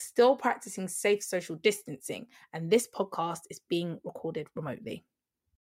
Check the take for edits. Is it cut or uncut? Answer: uncut